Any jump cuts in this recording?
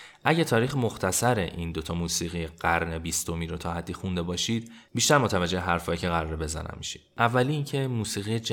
no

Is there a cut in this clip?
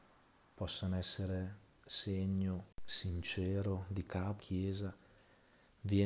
yes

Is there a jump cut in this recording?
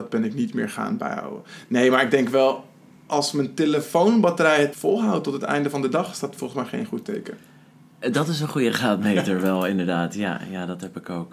yes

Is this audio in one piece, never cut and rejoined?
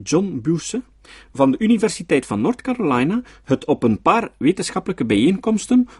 yes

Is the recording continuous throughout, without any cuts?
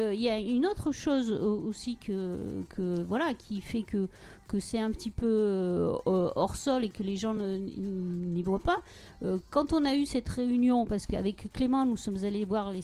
yes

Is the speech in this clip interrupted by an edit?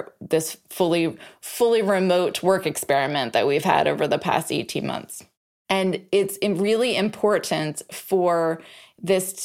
no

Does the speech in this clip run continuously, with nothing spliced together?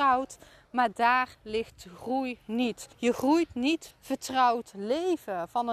no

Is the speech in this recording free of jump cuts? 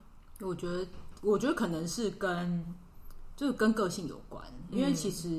no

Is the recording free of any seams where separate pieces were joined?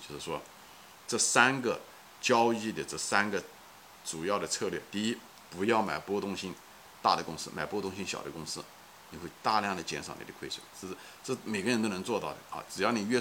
yes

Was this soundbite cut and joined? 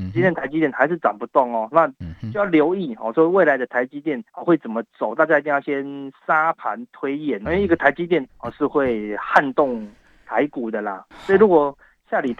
yes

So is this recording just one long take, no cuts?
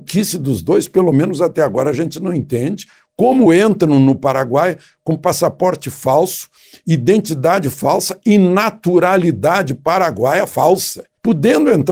yes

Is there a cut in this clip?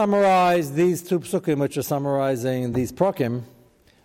no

